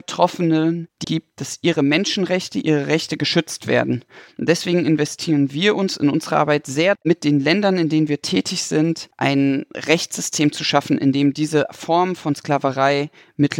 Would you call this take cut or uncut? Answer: cut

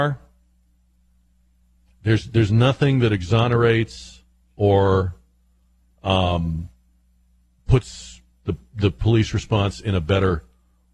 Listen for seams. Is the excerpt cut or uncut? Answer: uncut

